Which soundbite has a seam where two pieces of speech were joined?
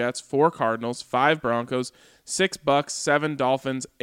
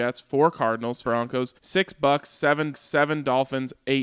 second; 3 cuts; at 1.0 s, 1.6 s, 2.7 s

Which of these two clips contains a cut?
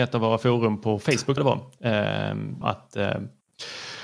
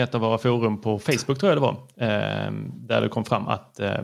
first; 2 cuts; at 1.4 s, 2.6 s

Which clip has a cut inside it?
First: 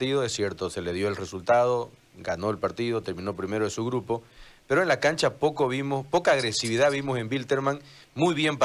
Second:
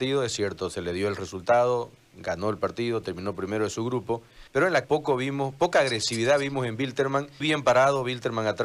second; 3 cuts; at 4.5 s, 4.8 s, 7.4 s

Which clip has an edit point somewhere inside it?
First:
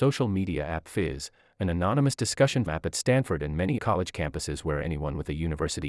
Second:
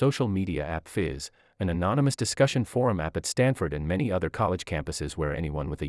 first; 2 cuts; at 2.7 s, 3.8 s

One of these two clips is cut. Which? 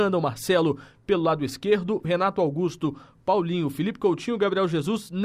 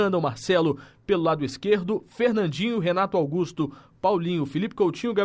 first; 1 cut; at 2.0 s

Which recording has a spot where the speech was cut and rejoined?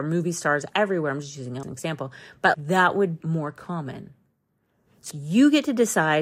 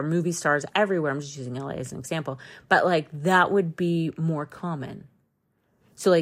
first; 4 cuts; at 1.6 s, 2.5 s, 3.2 s, 5.1 s

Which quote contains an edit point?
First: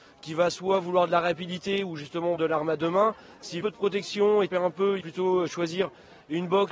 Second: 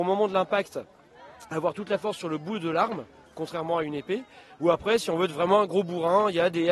first; 4 cuts; at 2.4 s, 3.6 s, 4.5 s, 5.0 s

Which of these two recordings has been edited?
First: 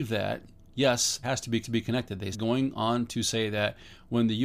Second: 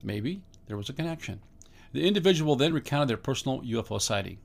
first; 3 cuts; at 1.2 s, 1.6 s, 2.3 s

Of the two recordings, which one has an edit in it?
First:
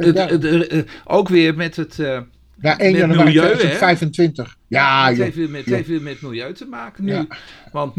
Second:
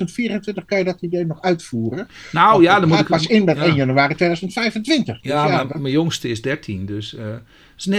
first; 1 cut; at 5.7 s

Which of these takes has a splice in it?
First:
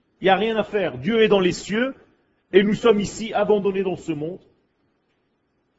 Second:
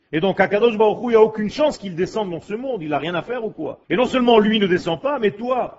second; 1 cut; at 3.8 s

